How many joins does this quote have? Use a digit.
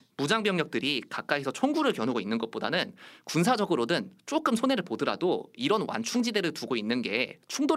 0